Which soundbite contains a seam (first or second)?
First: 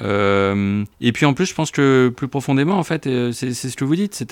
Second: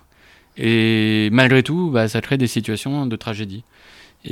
first